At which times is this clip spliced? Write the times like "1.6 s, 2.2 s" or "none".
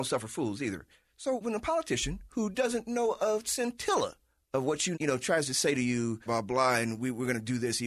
1.4 s, 4.9 s, 6.3 s